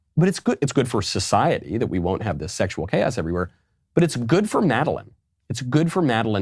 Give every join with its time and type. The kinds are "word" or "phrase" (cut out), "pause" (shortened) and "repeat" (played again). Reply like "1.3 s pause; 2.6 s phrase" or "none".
none